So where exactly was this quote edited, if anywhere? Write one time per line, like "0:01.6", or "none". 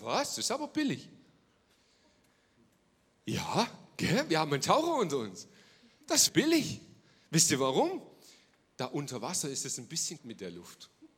0:06.3
0:10.2